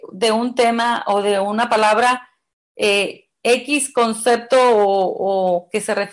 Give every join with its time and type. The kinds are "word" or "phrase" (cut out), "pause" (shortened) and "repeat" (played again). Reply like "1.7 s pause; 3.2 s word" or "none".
none